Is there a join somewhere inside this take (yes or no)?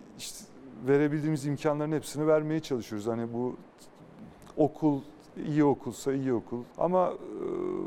yes